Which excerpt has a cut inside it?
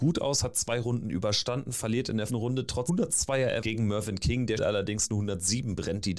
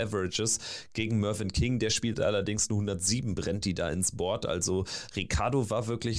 first; 4 cuts; at 2.3 s, 2.9 s, 3.6 s, 4.6 s

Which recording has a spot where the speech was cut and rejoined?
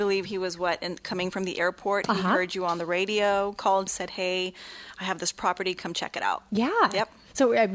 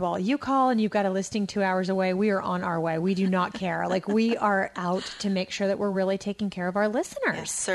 first; 1 cut; at 3.9 s

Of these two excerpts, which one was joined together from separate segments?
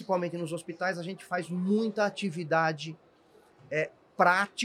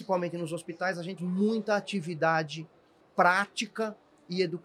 second; 2 cuts; at 1.2 s, 3.0 s

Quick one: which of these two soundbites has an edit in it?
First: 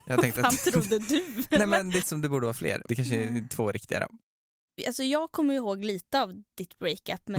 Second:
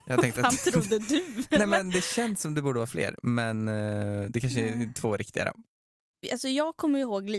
first; 2 cuts; at 2.0 s, 2.9 s

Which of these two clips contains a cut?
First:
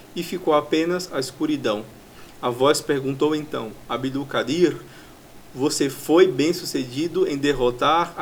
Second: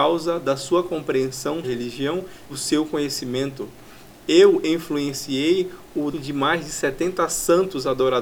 second; 3 cuts; at 1.6 s, 2.5 s, 6.1 s

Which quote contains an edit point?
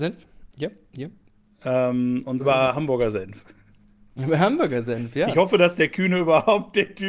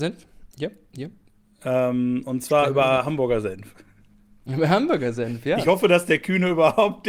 first; 1 cut; at 2.4 s

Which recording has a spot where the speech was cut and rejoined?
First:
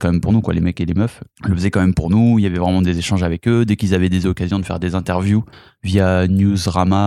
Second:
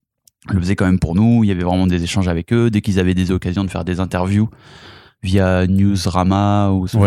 first; 2 cuts; at 1.3 s, 5.5 s

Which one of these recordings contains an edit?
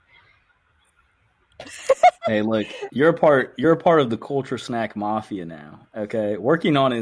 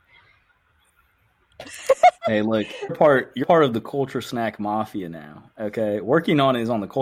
second; 2 cuts; at 2.9 s, 3.4 s

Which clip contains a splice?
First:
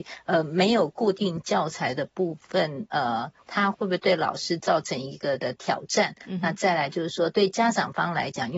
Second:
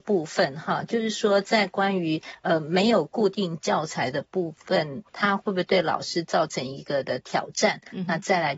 second; 1 cut; at 5.0 s

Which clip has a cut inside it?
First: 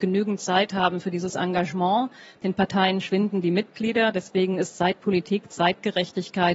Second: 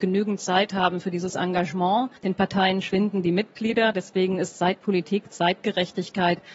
second; 1 cut; at 2.2 s

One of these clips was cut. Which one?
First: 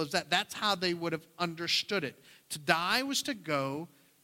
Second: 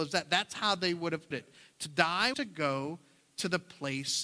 second; 2 cuts; at 1.3 s, 2.3 s

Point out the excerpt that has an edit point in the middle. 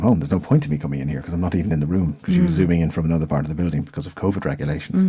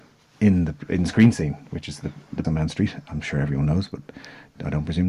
second; 1 cut; at 2.4 s

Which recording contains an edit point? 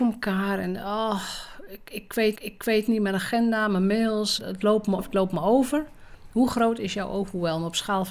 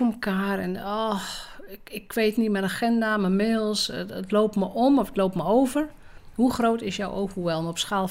first; 3 cuts; at 2.4 s, 4.4 s, 5.0 s

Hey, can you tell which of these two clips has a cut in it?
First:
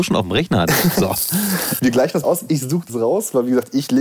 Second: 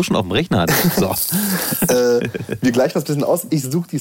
first; 3 cuts; at 1.8 s, 2.2 s, 2.9 s

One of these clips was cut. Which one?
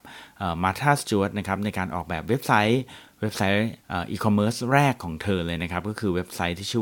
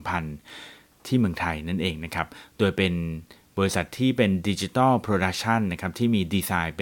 first; 1 cut; at 3.8 s

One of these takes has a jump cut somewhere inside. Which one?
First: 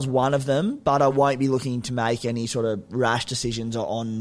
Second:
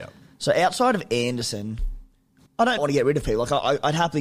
second; 2 cuts; at 2.5 s, 2.8 s

